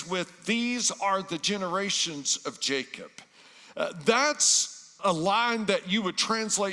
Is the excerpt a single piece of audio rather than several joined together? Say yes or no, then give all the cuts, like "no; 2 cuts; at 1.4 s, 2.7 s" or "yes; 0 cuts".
no; 1 cut; at 5.0 s